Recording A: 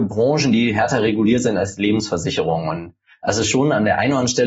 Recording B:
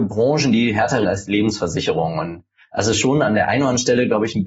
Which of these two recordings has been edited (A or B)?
B